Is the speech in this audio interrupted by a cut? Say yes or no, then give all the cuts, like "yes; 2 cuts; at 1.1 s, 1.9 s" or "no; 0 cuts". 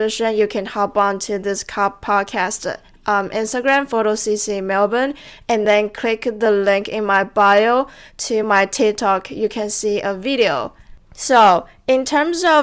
no; 0 cuts